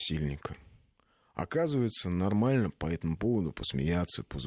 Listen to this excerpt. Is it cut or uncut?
uncut